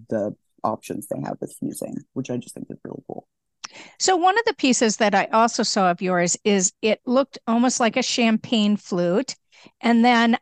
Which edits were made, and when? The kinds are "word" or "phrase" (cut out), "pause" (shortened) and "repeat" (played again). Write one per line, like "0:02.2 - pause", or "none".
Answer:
none

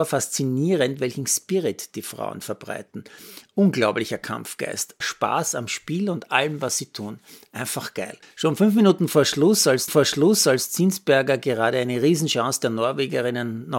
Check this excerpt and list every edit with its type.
0:05.0 - phrase
0:08.2 - pause
0:09.9 - repeat

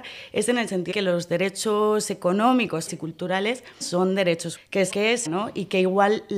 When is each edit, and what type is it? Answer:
0:00.9 - word
0:02.9 - word
0:03.8 - word
0:04.6 - word
0:04.9 - word
0:05.3 - word

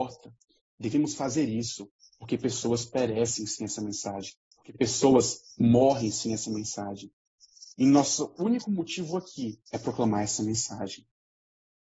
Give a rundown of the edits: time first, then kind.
0:04.5 - pause
0:09.7 - pause

